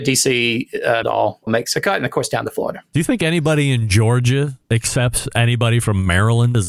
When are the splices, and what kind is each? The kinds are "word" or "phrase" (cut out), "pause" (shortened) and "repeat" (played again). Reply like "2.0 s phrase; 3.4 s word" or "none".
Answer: 1.0 s word; 1.5 s word; 4.6 s pause